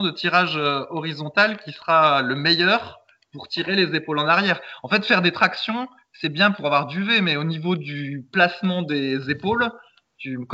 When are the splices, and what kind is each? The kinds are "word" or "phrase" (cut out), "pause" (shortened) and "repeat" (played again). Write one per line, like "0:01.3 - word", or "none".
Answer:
none